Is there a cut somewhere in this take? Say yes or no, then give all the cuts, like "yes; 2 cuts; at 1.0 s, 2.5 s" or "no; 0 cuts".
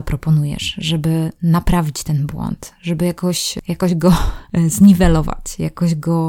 no; 0 cuts